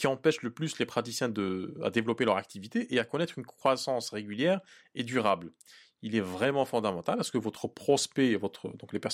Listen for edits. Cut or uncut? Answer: uncut